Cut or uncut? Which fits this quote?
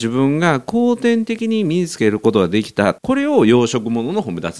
cut